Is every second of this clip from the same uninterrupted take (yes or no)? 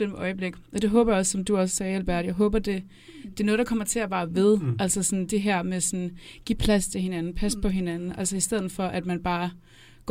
yes